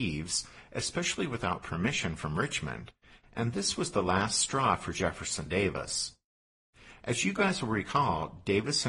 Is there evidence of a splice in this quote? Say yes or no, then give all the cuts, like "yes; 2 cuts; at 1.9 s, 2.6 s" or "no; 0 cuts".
no; 0 cuts